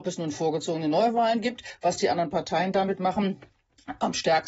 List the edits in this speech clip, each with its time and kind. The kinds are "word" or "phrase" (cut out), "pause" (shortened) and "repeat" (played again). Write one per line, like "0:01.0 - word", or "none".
none